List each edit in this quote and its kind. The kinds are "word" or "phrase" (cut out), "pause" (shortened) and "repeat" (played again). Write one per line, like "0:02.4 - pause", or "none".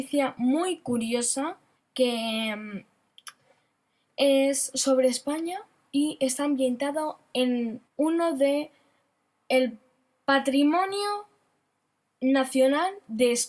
0:01.8 - pause
0:07.9 - pause